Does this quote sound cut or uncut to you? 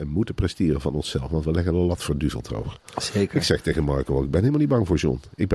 uncut